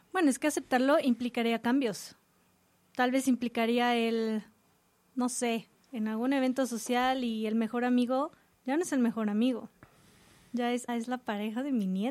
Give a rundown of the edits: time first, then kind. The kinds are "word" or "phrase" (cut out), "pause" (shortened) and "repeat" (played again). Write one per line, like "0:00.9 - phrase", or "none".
0:10.9 - word